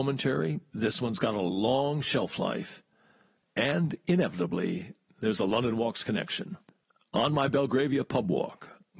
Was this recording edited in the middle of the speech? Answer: no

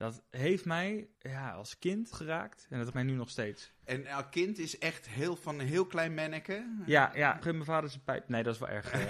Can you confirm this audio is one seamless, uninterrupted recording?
no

